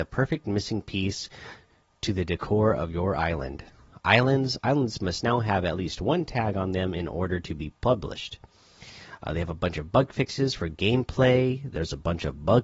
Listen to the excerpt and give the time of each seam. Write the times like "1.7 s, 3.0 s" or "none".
none